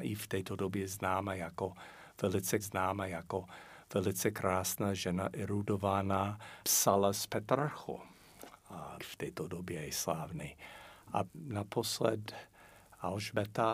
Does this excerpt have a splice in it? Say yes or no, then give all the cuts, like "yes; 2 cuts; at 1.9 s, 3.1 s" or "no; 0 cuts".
yes; 4 cuts; at 2.6 s, 6.6 s, 9.0 s, 11.3 s